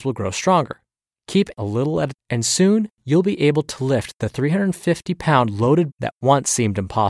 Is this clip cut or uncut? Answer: cut